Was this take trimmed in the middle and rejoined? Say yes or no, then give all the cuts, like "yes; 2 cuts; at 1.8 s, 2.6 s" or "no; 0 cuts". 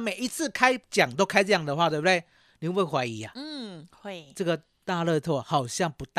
no; 0 cuts